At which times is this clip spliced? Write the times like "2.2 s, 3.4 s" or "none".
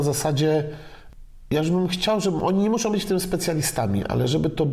none